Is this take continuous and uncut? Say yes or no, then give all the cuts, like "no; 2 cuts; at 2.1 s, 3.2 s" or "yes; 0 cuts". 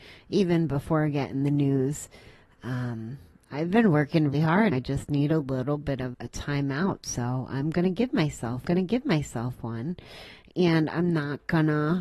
no; 4 cuts; at 4.3 s, 4.7 s, 6.1 s, 8.6 s